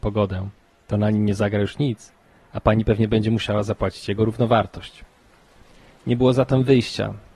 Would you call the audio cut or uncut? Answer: uncut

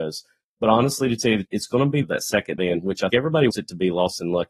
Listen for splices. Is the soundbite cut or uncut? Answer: cut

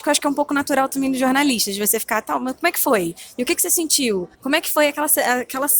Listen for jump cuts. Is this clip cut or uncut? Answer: cut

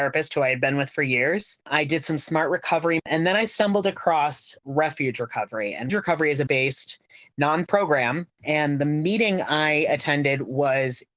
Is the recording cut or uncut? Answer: cut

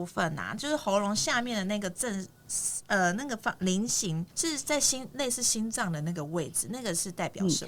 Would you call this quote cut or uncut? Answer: cut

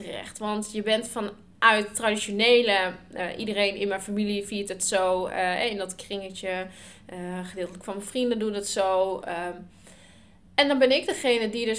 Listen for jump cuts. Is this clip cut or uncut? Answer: uncut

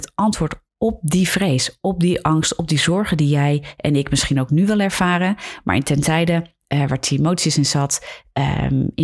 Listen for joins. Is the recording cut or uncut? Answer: uncut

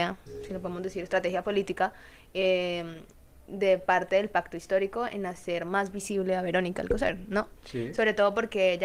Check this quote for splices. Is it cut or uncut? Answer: uncut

